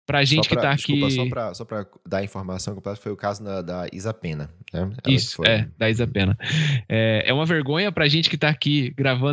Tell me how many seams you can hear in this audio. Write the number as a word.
zero